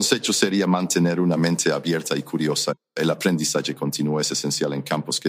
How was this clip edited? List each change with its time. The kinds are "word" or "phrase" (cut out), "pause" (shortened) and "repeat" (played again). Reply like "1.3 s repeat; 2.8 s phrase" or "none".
none